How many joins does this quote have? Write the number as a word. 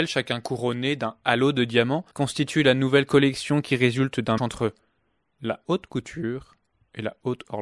two